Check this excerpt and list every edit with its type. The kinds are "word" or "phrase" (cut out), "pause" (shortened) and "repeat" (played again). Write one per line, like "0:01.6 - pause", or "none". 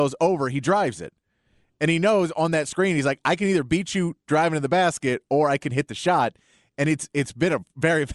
none